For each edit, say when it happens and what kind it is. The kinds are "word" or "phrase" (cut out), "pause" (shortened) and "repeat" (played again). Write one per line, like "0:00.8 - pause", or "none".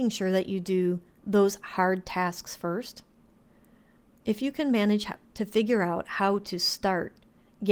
none

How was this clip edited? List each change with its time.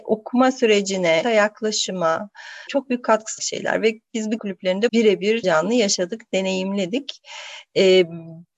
0:01.2 - word
0:02.7 - word
0:03.4 - word
0:04.4 - word
0:04.9 - word
0:05.4 - word

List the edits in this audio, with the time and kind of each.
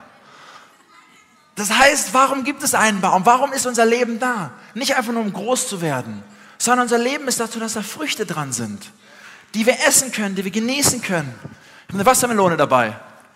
none

